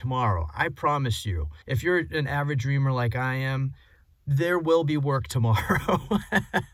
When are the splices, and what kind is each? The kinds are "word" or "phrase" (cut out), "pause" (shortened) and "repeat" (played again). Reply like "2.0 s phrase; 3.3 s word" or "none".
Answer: 1.6 s pause